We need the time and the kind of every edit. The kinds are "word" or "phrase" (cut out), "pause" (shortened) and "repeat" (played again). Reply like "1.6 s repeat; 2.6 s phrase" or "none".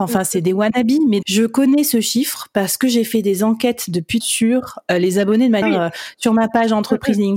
1.2 s word; 4.2 s phrase; 5.6 s word